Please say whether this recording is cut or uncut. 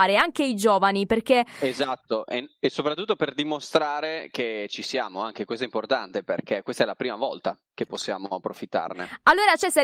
uncut